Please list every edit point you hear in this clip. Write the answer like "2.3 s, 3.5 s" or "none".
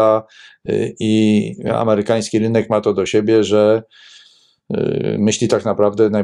none